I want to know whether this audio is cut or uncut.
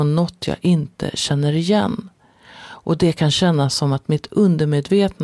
uncut